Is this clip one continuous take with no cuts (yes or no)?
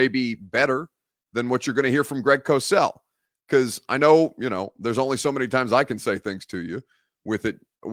yes